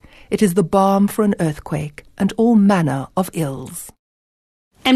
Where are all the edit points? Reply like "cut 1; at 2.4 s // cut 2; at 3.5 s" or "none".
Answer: cut 1; at 2.1 s